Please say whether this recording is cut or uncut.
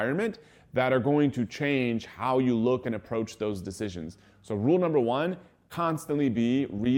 uncut